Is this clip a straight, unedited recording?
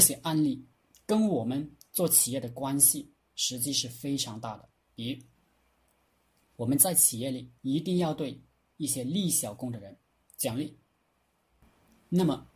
no; 1 cut; at 7.6 s

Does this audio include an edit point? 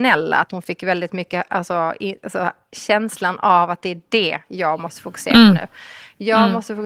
no; 0 cuts

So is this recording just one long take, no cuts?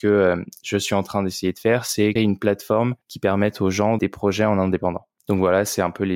no; 4 cuts; at 2.2 s, 3.0 s, 4.0 s, 5.2 s

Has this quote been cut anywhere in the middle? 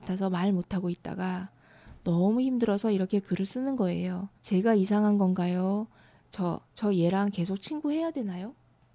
yes; 2 cuts; at 4.4 s, 6.7 s

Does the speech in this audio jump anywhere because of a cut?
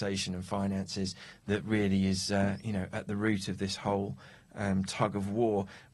no; 0 cuts

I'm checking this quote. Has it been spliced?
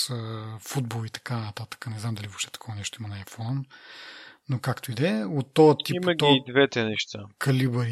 no; 0 cuts

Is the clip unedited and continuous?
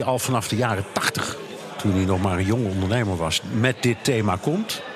yes; 0 cuts

